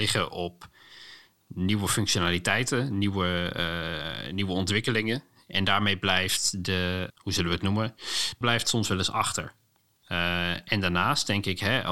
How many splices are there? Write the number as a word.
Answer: two